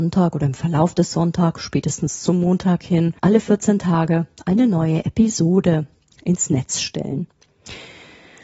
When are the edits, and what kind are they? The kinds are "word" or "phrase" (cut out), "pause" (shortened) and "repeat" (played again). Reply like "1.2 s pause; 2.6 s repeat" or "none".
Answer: 3.2 s pause